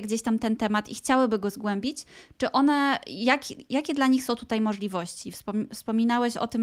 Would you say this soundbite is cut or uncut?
uncut